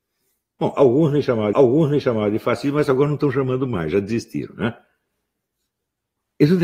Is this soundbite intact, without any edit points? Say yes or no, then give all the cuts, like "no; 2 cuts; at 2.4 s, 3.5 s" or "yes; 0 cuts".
no; 1 cut; at 1.5 s